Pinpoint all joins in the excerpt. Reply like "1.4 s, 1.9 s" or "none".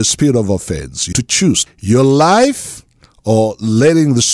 1.1 s, 1.7 s